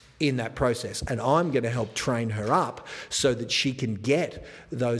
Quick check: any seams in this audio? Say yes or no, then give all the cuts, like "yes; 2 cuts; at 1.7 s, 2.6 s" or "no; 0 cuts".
no; 0 cuts